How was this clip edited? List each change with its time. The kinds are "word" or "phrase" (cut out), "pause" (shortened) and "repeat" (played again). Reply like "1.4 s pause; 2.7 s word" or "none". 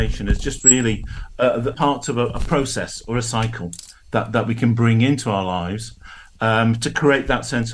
1.7 s word